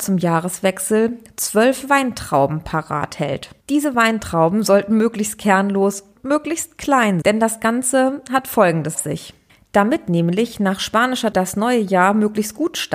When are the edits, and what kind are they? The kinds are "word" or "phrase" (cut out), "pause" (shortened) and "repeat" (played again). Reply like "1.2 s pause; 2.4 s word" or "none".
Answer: 3.6 s pause; 6.2 s word; 7.2 s word; 8.9 s word; 9.5 s pause; 11.3 s word